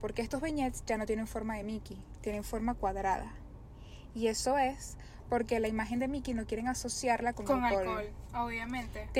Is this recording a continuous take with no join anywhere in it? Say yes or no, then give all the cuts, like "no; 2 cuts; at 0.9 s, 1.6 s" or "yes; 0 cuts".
yes; 0 cuts